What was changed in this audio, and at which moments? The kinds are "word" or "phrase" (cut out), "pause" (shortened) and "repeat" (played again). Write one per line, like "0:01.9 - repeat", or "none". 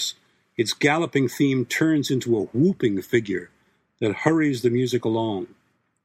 none